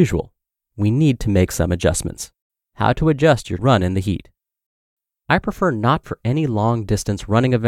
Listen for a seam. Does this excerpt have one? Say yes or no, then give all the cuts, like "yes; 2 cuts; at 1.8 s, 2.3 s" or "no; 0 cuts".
yes; 3 cuts; at 2.5 s, 3.6 s, 6.0 s